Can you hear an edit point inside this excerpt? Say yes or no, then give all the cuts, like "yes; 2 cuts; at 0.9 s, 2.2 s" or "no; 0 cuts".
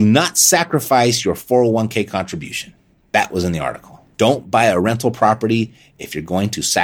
yes; 2 cuts; at 2.9 s, 4.1 s